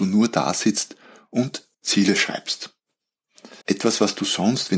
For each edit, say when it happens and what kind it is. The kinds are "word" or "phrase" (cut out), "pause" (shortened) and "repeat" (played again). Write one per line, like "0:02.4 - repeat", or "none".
0:01.7 - pause
0:03.6 - pause